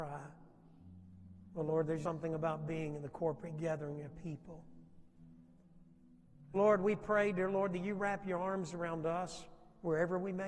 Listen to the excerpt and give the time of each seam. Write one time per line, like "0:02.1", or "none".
0:02.0
0:06.5